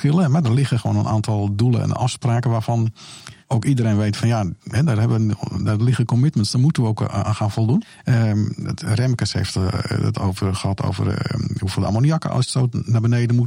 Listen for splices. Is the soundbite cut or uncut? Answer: cut